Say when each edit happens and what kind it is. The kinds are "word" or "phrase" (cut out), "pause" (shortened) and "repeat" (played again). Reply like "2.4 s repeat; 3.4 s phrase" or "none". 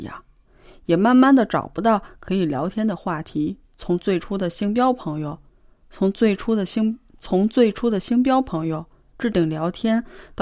3.6 s pause